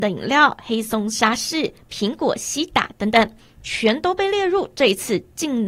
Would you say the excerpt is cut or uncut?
uncut